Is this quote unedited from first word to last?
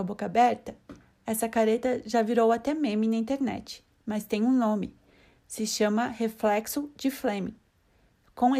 yes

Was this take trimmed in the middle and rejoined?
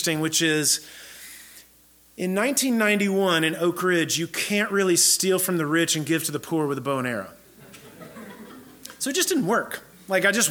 no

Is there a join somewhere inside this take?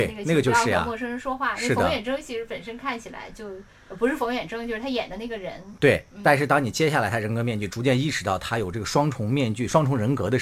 no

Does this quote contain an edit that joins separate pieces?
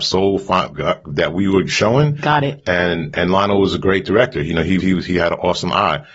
yes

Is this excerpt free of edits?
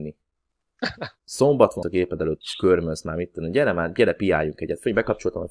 no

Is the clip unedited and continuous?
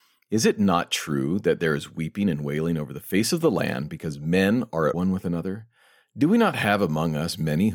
no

